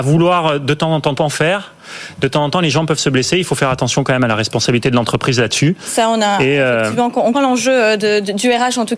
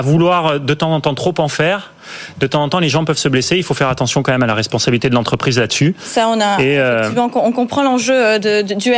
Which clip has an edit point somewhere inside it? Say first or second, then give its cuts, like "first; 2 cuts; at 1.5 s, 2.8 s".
first; 2 cuts; at 1.1 s, 7.3 s